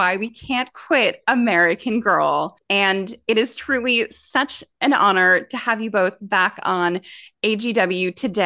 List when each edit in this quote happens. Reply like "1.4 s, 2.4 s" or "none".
none